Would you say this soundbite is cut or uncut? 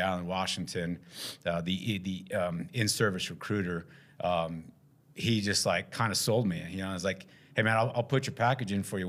uncut